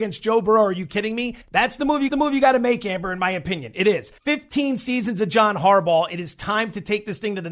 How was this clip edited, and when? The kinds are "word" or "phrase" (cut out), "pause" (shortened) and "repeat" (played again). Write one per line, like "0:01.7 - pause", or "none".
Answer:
0:01.4 - pause
0:02.1 - repeat
0:04.2 - pause